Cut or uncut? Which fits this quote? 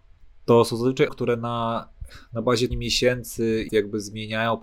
cut